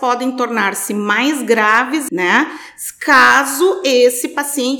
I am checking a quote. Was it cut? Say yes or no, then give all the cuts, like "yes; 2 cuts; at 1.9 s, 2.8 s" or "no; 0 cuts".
yes; 1 cut; at 2.1 s